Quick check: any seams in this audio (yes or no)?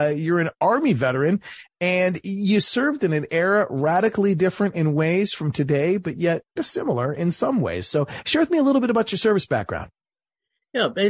no